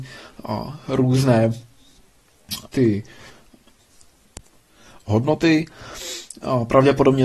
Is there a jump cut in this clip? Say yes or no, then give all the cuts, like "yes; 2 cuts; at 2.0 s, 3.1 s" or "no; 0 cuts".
yes; 1 cut; at 2.7 s